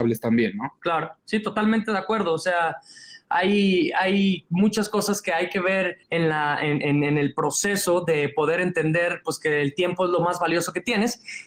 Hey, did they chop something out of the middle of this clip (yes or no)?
yes